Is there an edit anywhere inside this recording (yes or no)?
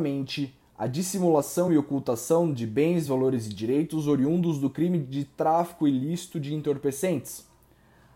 no